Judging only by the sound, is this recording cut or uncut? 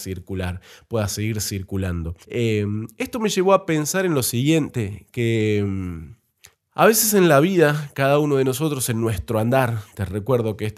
cut